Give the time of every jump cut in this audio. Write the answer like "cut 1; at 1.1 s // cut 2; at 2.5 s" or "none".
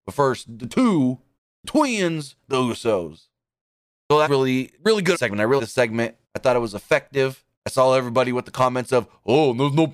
cut 1; at 1.3 s // cut 2; at 3.6 s // cut 3; at 4.2 s // cut 4; at 4.7 s // cut 5; at 5.1 s // cut 6; at 5.6 s // cut 7; at 6.2 s // cut 8; at 7.5 s

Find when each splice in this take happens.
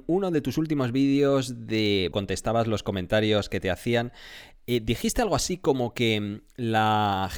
cut 1; at 2.1 s

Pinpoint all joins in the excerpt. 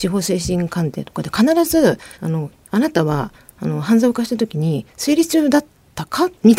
cut 1; at 2.1 s // cut 2; at 2.6 s

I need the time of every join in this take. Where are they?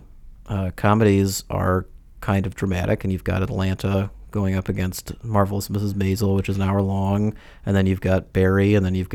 none

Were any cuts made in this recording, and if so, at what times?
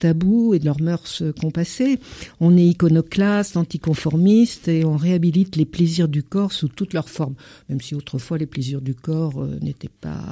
none

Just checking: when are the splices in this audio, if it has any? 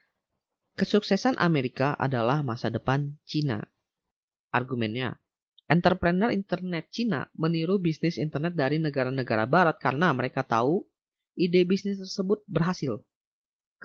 none

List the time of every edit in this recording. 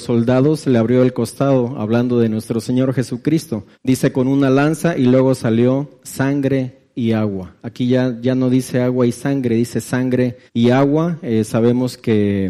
cut 1; at 3.7 s // cut 2; at 10.5 s

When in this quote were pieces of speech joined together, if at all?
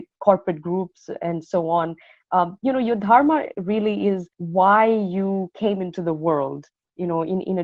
cut 1; at 4.3 s

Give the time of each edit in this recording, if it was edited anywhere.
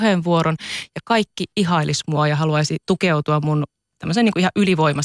none

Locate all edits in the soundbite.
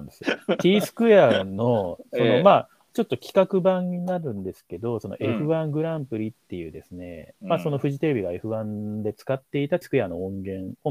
cut 1; at 9.8 s

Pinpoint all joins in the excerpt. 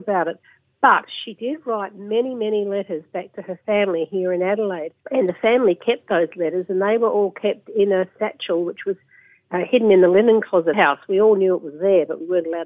cut 1; at 5.0 s // cut 2; at 10.7 s

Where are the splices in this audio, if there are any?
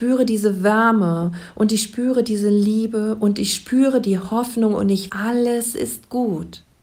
cut 1; at 5.1 s

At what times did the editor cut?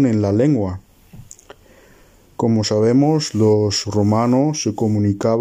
none

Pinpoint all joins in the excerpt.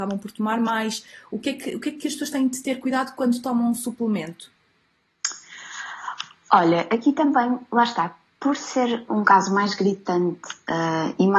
none

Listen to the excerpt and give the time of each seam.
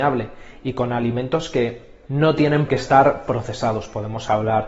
cut 1; at 2.1 s // cut 2; at 2.7 s

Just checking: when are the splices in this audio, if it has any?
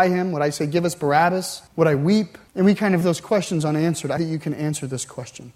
cut 1; at 1.7 s // cut 2; at 2.5 s // cut 3; at 3.0 s // cut 4; at 4.2 s

